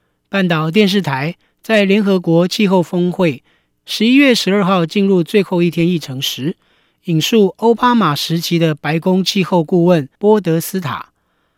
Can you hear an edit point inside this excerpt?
yes; 1 cut; at 10.1 s

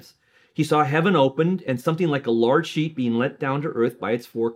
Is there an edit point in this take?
no; 0 cuts

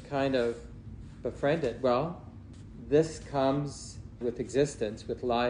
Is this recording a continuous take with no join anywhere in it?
no; 1 cut; at 4.2 s

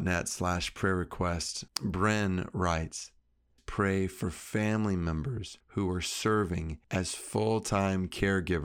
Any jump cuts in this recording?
yes; 4 cuts; at 1.7 s, 3.6 s, 5.6 s, 6.8 s

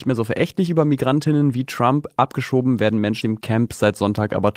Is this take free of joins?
no; 1 cut; at 3.2 s

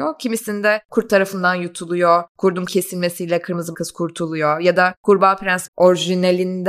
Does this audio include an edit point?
yes; 3 cuts; at 2.7 s, 3.7 s, 5.7 s

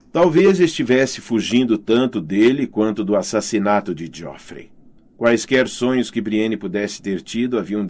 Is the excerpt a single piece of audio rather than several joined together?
no; 1 cut; at 5.0 s

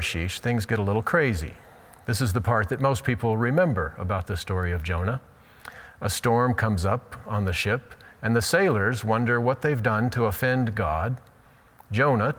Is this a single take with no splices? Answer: yes; 0 cuts

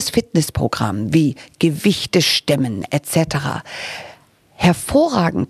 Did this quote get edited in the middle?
no; 0 cuts

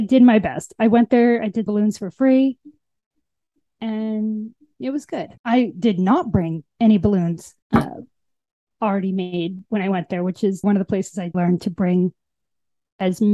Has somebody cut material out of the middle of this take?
yes; 6 cuts; at 1.7 s, 5.4 s, 6.7 s, 7.6 s, 10.6 s, 11.3 s

